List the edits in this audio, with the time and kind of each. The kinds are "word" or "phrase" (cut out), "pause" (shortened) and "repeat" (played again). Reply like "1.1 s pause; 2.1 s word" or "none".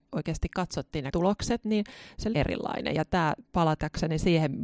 1.1 s word; 2.3 s phrase; 3.4 s pause